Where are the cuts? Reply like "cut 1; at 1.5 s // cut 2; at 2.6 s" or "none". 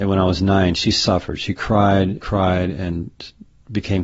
cut 1; at 2.2 s